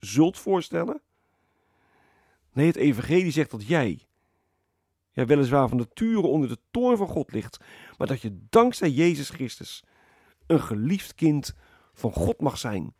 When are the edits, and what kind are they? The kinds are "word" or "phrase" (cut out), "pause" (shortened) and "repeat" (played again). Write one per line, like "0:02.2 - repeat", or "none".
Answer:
none